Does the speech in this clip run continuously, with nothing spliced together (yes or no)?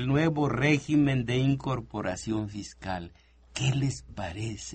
yes